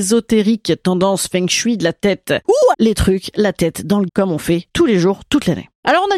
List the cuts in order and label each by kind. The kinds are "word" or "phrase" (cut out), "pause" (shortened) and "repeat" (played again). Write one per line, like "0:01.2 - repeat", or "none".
0:02.7 - word
0:04.1 - word